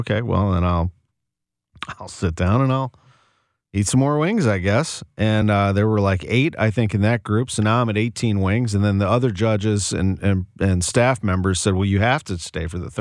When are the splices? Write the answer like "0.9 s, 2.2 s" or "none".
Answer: none